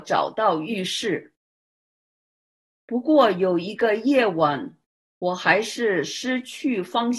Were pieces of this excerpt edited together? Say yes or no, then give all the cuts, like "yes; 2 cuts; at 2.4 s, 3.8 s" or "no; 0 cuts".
no; 0 cuts